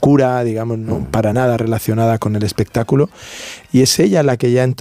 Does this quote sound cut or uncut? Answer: uncut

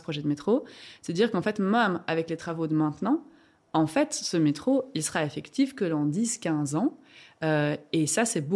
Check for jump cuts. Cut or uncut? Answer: uncut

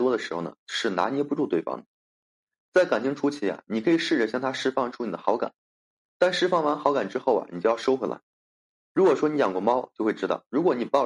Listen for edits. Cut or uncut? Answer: uncut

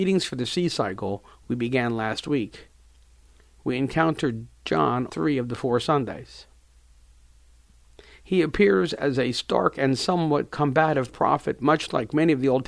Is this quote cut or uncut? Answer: cut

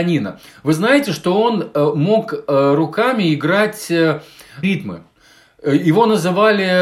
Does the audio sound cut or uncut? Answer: cut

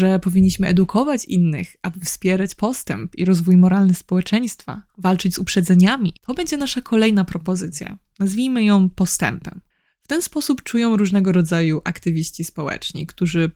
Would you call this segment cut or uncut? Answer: cut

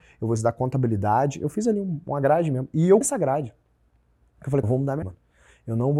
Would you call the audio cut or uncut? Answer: cut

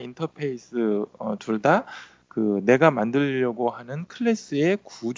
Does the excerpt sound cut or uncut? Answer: uncut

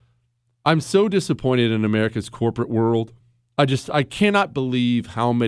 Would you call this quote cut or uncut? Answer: uncut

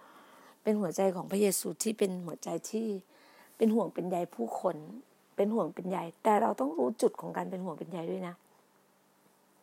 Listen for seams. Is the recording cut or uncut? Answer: uncut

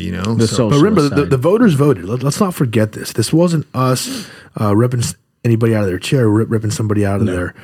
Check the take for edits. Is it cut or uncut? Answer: uncut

